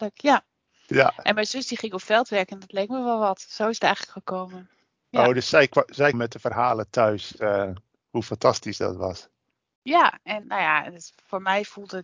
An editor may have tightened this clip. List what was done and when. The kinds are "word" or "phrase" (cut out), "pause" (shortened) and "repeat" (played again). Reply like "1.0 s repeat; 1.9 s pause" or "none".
6.1 s word; 10.4 s word